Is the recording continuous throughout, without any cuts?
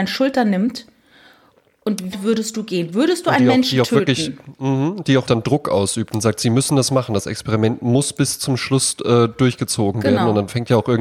no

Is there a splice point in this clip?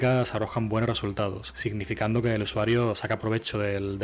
no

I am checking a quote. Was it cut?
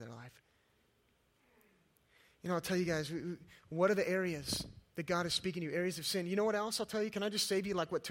no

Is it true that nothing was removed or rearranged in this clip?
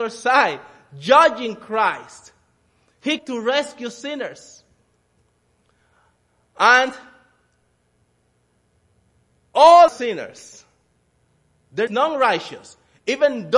no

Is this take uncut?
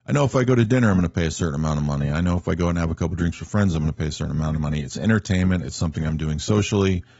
yes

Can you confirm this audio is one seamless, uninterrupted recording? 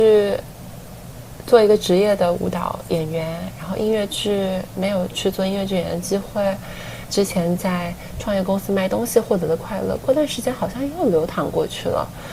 no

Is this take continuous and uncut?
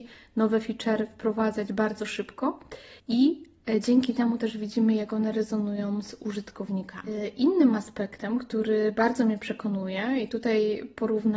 no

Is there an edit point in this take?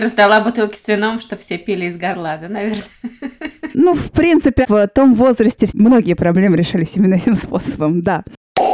no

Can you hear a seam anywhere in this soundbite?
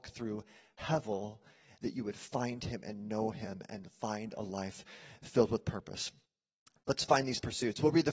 no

